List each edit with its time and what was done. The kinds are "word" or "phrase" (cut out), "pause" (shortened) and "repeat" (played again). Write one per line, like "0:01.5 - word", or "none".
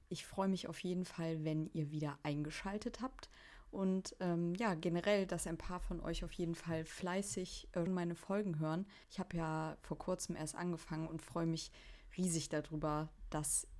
0:07.9 - word
0:09.0 - pause